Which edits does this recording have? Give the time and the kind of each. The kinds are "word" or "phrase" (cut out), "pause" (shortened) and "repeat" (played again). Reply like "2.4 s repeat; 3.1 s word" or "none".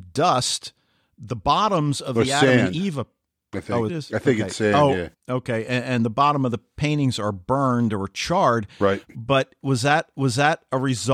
3.9 s phrase; 5.2 s pause; 10.1 s repeat